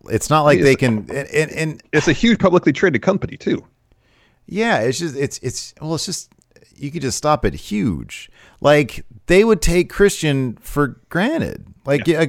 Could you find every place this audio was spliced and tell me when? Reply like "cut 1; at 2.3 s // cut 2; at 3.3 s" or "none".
none